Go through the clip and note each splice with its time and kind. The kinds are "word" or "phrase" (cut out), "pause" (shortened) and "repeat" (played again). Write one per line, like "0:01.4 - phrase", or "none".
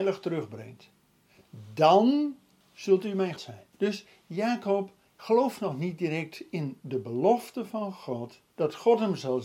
0:02.6 - pause
0:03.4 - word
0:03.7 - pause
0:05.1 - pause
0:08.5 - pause

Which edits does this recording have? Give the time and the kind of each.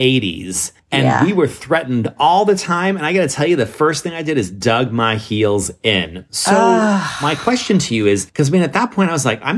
none

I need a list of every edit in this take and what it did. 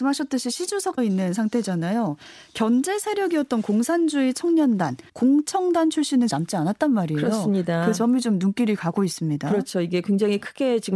0:01.0 - phrase
0:05.1 - pause
0:06.3 - phrase

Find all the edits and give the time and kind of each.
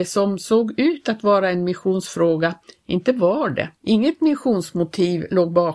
0:03.8 - pause

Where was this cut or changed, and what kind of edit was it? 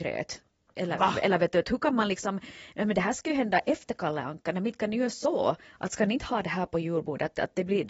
none

